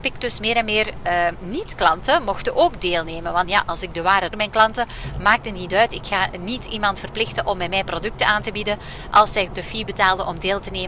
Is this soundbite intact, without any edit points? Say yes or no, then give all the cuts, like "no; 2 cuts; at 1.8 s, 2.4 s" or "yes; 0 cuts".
no; 3 cuts; at 3.4 s, 4.3 s, 9.5 s